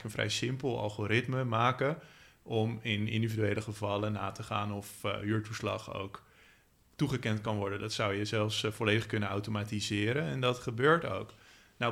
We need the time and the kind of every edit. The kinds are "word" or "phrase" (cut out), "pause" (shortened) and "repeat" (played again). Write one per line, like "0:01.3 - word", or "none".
none